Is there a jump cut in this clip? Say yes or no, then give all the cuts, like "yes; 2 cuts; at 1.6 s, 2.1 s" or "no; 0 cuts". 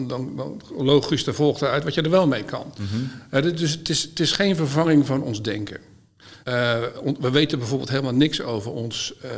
yes; 1 cut; at 6.4 s